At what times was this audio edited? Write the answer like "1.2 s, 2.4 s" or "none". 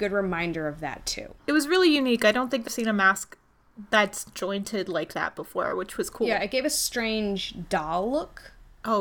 1.4 s, 2.7 s